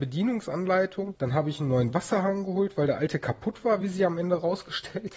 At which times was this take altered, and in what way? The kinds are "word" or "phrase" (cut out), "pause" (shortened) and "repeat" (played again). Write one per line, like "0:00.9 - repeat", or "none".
none